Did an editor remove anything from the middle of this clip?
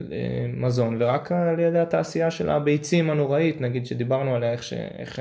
no; 0 cuts

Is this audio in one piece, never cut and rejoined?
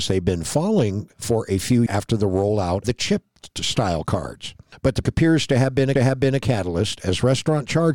no; 4 cuts; at 1.9 s, 2.8 s, 5.0 s, 6.0 s

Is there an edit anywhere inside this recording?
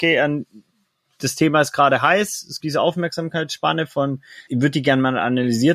yes; 2 cuts; at 2.6 s, 4.5 s

